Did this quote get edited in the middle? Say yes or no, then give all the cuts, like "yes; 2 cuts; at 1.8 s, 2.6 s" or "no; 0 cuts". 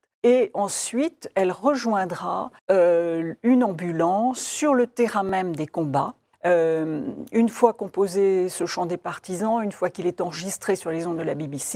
yes; 2 cuts; at 2.6 s, 6.3 s